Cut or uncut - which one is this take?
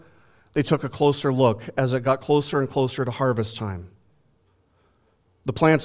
uncut